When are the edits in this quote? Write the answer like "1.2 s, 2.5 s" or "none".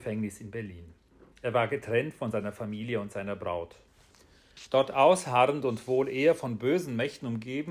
1.3 s